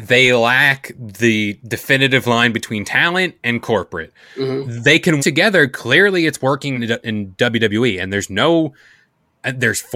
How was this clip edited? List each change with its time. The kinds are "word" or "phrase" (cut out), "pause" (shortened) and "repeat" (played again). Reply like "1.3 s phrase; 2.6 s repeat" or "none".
3.4 s pause; 5.2 s word; 6.8 s word